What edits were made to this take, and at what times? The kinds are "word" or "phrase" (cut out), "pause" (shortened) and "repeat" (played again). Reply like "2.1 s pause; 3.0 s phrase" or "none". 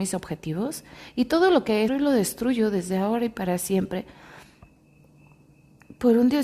1.9 s phrase